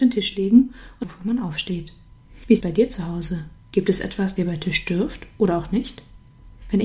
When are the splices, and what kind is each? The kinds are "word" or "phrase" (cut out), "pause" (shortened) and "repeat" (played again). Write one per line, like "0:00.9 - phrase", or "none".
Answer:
0:01.0 - phrase
0:02.6 - word
0:03.6 - pause
0:04.4 - word